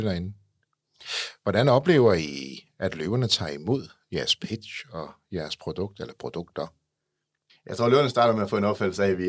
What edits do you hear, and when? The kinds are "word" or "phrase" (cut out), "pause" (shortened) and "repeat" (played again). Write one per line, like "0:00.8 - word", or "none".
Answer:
none